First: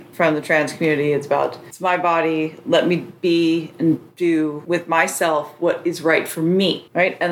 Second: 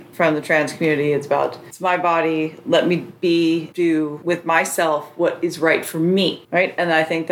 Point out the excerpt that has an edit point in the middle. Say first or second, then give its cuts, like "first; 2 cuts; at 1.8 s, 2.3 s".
second; 1 cut; at 3.7 s